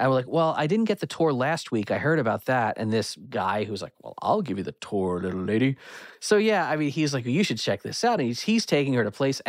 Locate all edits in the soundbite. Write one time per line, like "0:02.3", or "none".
none